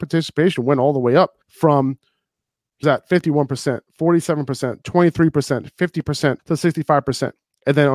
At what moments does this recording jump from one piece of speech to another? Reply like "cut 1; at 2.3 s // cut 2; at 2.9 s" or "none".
cut 1; at 1.4 s // cut 2; at 2.8 s // cut 3; at 3.9 s // cut 4; at 6.4 s